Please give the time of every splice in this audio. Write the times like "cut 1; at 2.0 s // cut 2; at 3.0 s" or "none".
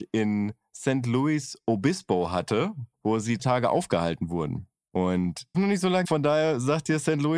cut 1; at 2.9 s // cut 2; at 3.4 s // cut 3; at 5.5 s // cut 4; at 6.0 s